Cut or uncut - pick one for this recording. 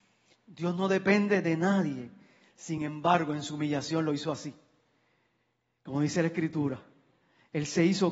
uncut